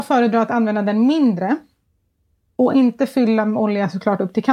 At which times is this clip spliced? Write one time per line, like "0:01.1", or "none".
none

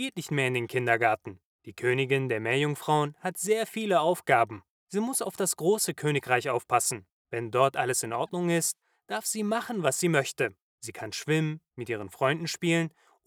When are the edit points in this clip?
none

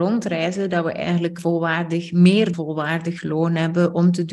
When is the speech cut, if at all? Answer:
0:01.4
0:02.5

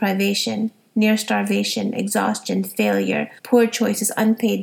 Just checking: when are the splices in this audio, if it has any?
0:03.4

